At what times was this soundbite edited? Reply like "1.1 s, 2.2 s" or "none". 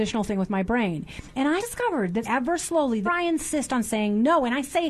1.6 s, 2.2 s, 2.6 s, 3.1 s

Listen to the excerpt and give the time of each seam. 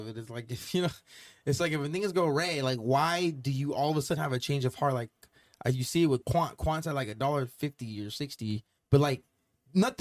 8.8 s

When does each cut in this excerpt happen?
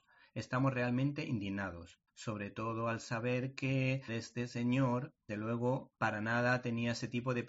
2.1 s, 4.1 s, 5.3 s, 5.9 s

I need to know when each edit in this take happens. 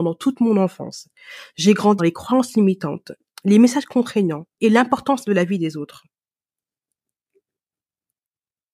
2.0 s

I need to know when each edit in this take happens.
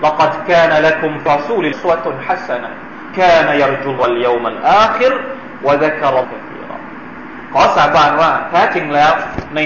1.3 s, 1.7 s, 3.1 s, 4.0 s, 6.2 s

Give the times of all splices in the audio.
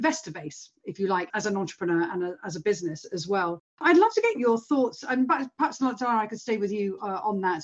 1.3 s, 4.3 s

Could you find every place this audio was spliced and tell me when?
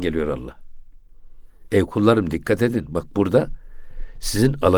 none

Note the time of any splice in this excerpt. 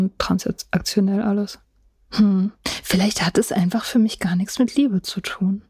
none

